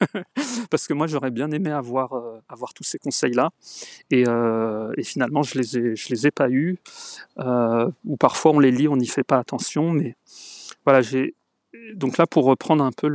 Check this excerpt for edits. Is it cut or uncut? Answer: uncut